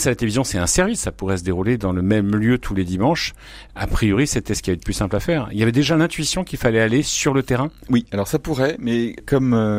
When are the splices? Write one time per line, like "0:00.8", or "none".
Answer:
none